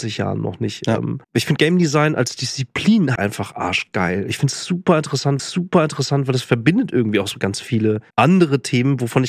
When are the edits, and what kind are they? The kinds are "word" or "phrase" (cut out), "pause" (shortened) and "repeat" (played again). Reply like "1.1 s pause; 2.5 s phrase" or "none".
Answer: 1.2 s pause; 3.2 s word; 5.4 s repeat; 8.1 s pause